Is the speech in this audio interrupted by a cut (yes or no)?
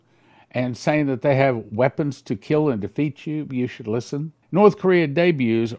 yes